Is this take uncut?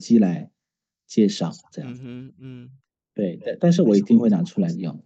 yes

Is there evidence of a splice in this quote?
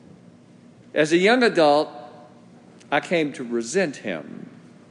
no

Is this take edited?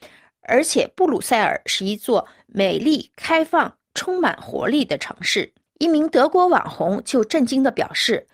yes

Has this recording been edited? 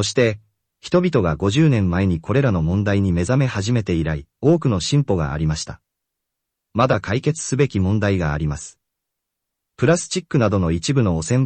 yes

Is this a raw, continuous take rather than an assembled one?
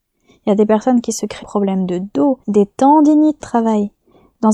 no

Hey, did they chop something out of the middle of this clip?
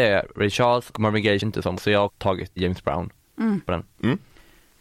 yes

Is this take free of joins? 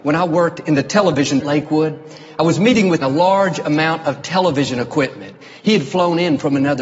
no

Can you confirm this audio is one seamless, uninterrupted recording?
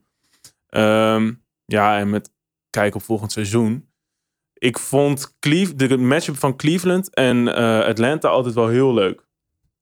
yes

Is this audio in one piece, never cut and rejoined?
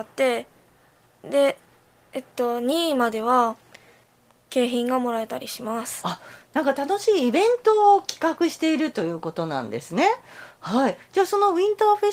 yes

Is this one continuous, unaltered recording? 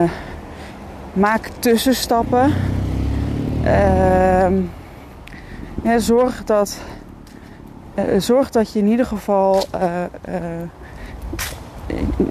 yes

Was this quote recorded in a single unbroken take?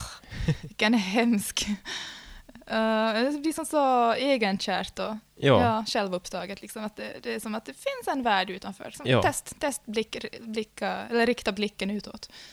yes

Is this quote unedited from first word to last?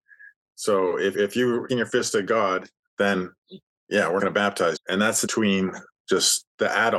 no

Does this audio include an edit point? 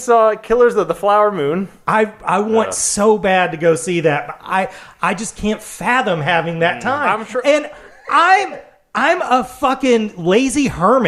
no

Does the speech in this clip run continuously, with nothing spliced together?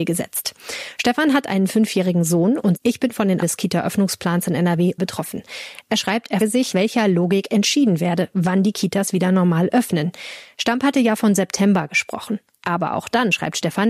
no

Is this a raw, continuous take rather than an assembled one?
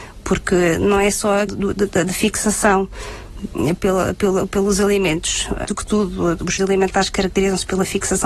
no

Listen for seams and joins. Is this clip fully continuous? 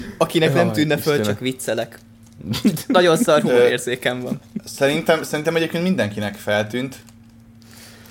yes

